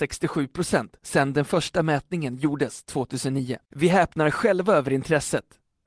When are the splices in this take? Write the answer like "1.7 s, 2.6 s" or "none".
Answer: 3.6 s